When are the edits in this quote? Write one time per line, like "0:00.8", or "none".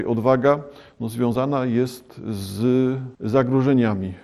0:03.1